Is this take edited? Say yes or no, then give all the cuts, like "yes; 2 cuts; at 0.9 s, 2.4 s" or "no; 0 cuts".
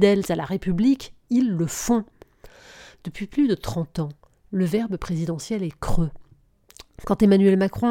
no; 0 cuts